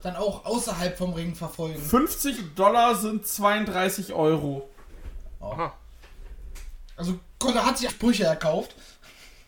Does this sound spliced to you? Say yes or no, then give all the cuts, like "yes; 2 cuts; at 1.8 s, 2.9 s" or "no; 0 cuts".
yes; 2 cuts; at 2.4 s, 7.9 s